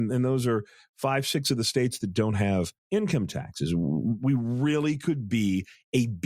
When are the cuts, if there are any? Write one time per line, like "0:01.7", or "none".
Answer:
0:02.8